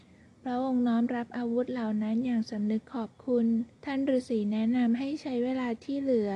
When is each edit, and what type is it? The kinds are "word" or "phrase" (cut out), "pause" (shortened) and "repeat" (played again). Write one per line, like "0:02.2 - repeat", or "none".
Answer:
0:03.7 - pause

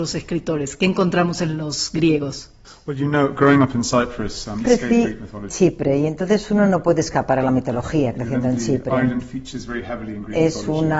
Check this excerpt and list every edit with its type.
0:04.6 - word
0:05.5 - word

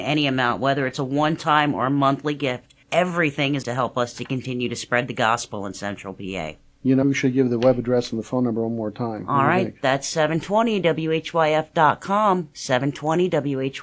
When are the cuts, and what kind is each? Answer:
0:02.8 - pause
0:03.6 - word
0:07.0 - word

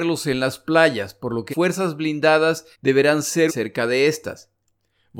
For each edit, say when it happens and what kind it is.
0:01.5 - word
0:02.7 - pause
0:03.5 - word

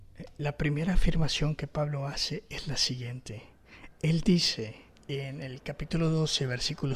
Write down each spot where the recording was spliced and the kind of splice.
0:04.9 - pause

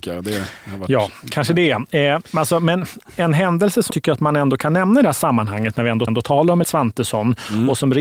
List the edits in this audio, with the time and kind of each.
0:03.9 - word
0:06.1 - repeat
0:06.6 - word

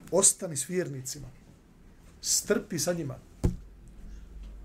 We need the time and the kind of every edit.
0:02.2 - pause
0:02.9 - word

